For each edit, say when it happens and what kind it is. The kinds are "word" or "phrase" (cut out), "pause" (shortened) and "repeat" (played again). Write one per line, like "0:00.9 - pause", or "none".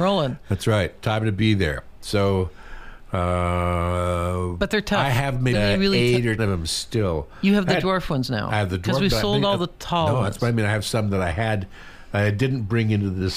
0:05.5 - word
0:06.4 - word